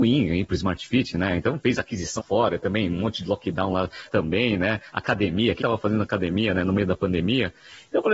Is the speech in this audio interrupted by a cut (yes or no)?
yes